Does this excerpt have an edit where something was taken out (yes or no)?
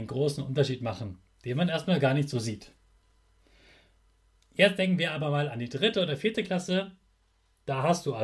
no